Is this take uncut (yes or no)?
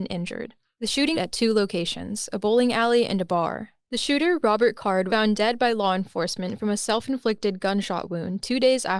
no